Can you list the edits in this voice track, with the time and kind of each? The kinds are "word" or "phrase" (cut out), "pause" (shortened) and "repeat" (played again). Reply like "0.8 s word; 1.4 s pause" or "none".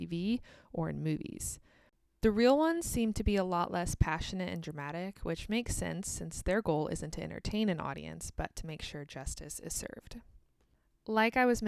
none

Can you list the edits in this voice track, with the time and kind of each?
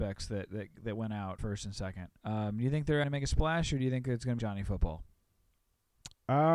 1.4 s word; 2.2 s pause; 3.0 s word; 4.4 s word

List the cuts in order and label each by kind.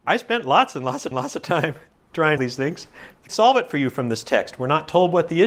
1.1 s repeat; 2.4 s phrase; 3.3 s phrase

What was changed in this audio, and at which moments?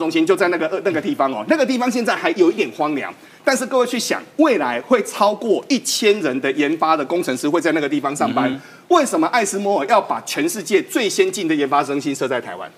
none

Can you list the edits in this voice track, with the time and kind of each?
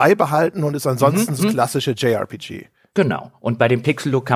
1.4 s word

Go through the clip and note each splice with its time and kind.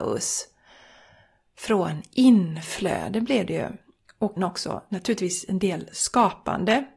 4.4 s word

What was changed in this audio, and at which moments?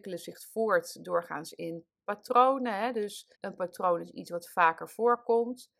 3.3 s pause

